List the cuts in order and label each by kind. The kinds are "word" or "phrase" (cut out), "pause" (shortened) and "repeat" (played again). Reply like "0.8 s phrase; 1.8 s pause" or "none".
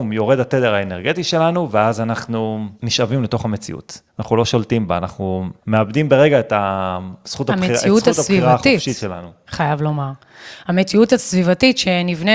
2.8 s pause; 4.1 s pause; 5.6 s pause

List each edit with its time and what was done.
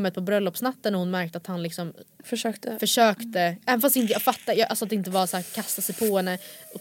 none

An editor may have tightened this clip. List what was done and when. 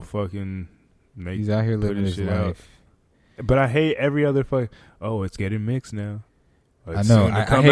none

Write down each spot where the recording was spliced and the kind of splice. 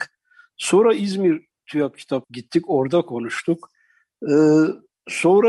2.2 s word

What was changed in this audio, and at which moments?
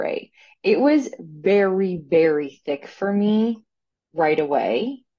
none

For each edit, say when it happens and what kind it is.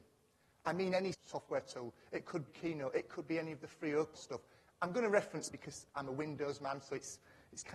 1.1 s word; 2.5 s word; 4.1 s word; 5.5 s word

